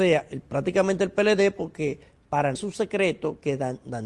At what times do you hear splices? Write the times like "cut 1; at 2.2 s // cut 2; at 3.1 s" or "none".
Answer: cut 1; at 2.6 s